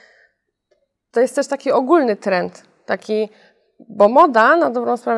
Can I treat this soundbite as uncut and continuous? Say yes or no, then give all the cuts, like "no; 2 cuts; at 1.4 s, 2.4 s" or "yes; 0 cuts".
yes; 0 cuts